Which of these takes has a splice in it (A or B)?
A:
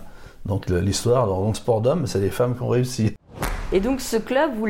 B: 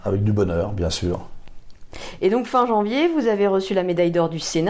A